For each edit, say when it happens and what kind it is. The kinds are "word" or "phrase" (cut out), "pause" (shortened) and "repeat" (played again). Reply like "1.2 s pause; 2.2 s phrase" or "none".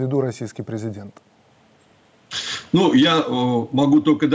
none